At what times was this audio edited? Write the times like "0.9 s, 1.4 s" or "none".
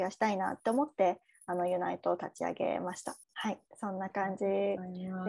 3.2 s, 3.7 s